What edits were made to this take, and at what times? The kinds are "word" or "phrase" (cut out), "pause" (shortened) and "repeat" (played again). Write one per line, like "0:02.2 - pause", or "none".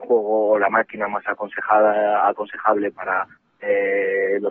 none